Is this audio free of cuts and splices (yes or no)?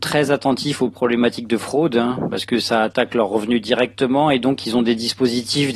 yes